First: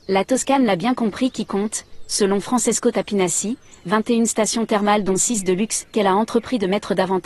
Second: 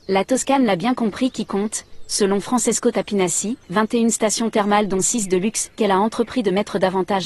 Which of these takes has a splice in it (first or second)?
second